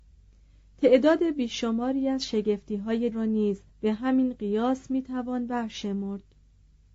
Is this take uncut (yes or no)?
no